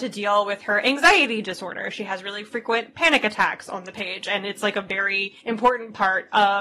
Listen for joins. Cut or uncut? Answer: cut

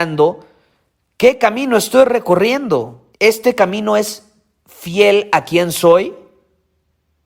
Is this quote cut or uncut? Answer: cut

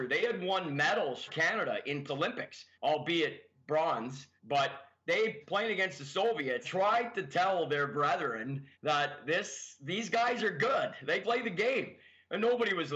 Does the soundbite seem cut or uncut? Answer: cut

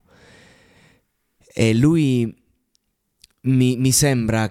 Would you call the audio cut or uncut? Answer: uncut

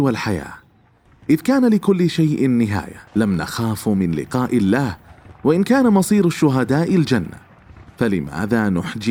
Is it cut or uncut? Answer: cut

